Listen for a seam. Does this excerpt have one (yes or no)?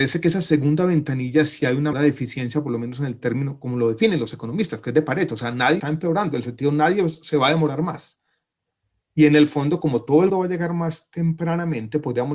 yes